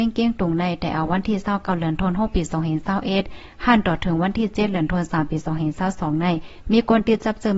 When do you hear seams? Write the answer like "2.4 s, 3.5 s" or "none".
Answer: none